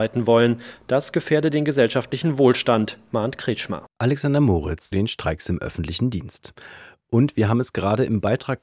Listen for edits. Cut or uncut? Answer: cut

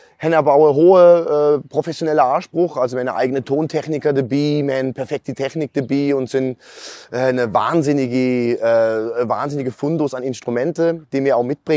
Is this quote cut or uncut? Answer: uncut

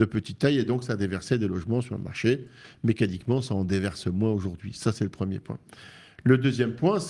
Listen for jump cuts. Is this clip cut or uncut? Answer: uncut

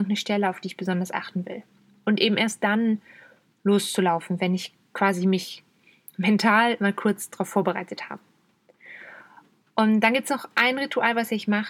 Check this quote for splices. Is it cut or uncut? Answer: uncut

